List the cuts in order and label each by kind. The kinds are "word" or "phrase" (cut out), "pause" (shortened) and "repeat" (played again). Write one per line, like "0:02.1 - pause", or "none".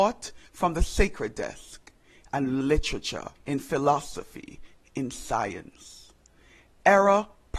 0:02.6 - phrase
0:03.4 - pause